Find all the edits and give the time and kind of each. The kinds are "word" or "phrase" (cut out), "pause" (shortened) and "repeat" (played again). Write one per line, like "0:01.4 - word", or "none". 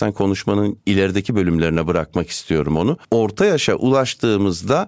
0:03.0 - pause